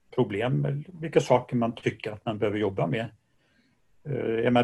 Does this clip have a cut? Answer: no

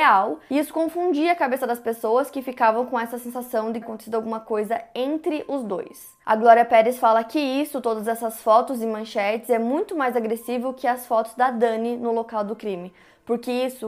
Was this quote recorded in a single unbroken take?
no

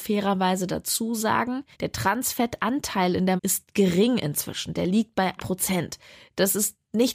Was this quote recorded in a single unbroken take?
no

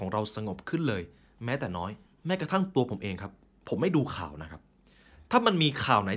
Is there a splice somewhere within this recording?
yes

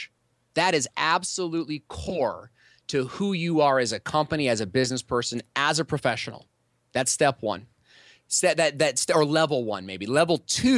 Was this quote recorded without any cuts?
yes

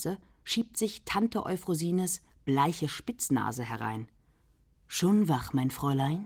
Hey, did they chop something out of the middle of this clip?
no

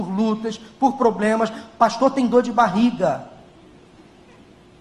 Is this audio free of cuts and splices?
yes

